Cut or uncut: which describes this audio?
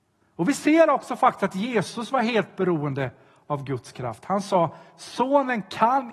uncut